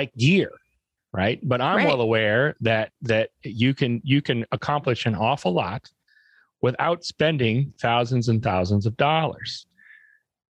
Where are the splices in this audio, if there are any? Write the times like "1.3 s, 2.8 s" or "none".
none